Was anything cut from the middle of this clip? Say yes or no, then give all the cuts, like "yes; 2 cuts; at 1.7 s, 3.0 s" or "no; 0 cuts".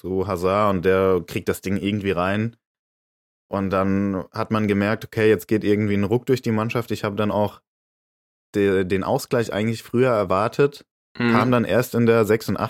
no; 0 cuts